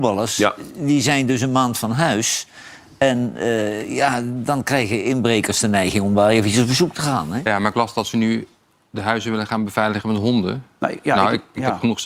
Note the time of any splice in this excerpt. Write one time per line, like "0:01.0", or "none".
none